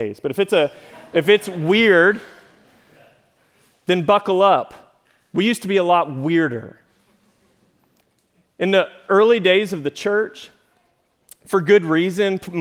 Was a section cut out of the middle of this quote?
no; 0 cuts

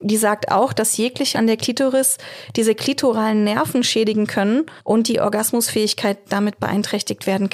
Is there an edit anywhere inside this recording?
yes; 2 cuts; at 1.3 s, 4.8 s

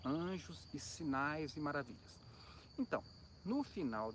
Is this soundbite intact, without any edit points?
yes; 0 cuts

